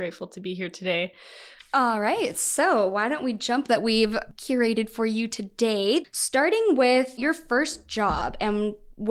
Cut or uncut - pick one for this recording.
cut